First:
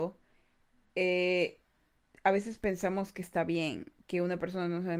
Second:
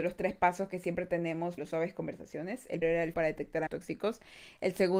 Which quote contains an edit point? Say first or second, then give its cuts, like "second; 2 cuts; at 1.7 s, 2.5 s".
second; 4 cuts; at 1.6 s, 2.8 s, 3.1 s, 3.7 s